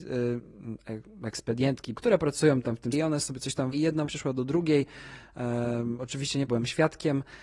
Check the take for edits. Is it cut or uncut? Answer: cut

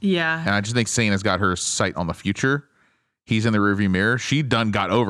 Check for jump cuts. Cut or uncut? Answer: cut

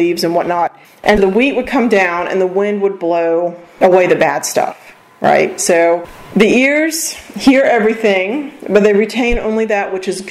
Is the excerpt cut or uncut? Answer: cut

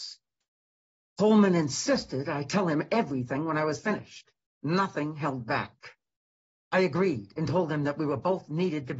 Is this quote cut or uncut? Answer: uncut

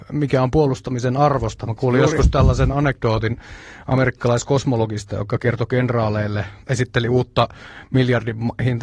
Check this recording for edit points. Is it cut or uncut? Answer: uncut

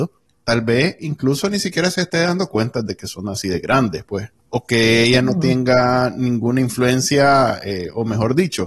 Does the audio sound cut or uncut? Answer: uncut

